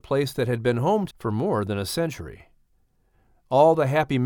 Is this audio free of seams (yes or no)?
no